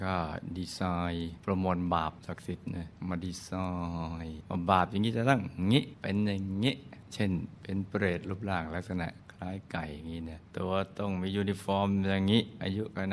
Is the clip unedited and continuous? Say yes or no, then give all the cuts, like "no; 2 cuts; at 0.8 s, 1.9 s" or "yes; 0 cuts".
no; 1 cut; at 10.5 s